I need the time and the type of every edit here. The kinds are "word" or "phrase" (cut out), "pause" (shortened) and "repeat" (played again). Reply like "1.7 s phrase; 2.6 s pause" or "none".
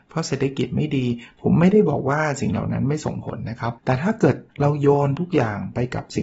3.8 s pause; 4.5 s pause